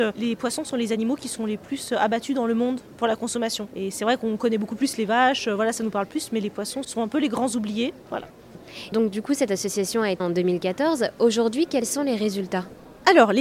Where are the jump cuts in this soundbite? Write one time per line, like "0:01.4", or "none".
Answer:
0:06.8
0:08.0
0:08.9
0:10.2